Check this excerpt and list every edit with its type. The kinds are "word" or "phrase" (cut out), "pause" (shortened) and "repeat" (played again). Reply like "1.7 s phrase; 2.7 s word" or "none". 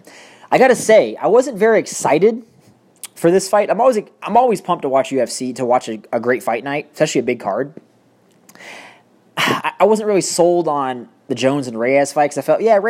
none